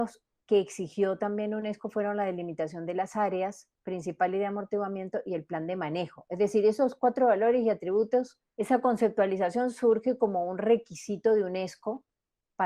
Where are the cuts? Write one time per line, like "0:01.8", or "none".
0:03.7
0:08.5